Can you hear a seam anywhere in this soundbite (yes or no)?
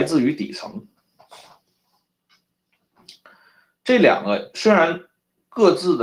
no